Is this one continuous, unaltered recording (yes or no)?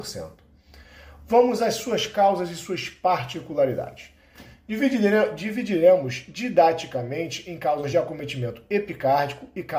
yes